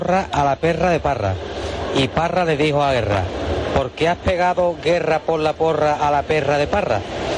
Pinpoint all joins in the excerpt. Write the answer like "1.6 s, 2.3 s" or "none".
none